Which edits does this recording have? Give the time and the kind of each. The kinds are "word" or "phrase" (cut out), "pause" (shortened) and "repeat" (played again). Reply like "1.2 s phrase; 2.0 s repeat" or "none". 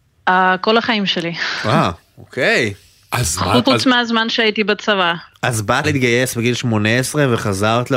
3.6 s word; 5.8 s word